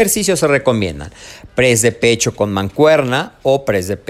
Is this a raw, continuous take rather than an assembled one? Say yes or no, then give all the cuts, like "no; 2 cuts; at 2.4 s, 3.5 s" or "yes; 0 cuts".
yes; 0 cuts